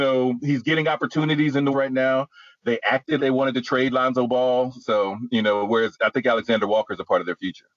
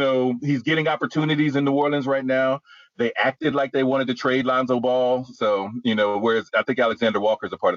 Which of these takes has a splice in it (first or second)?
first